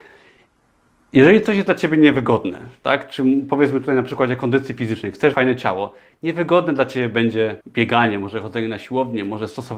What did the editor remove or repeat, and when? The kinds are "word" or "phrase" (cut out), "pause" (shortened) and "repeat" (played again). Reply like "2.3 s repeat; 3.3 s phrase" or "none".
5.3 s word; 7.6 s pause